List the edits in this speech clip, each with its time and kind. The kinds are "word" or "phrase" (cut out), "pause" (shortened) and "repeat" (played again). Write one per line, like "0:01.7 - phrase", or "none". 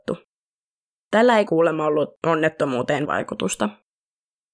0:01.5 - word
0:03.1 - word